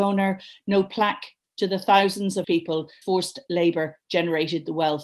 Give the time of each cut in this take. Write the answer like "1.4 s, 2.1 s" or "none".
1.4 s, 2.4 s, 3.0 s